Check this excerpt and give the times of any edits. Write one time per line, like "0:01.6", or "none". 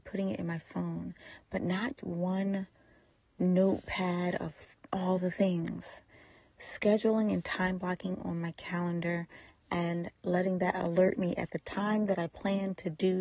0:02.0